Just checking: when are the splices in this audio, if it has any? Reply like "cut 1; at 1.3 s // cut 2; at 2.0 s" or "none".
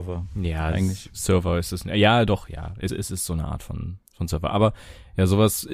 cut 1; at 2.9 s // cut 2; at 4.1 s